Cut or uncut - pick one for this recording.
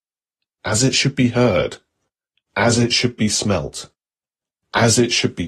uncut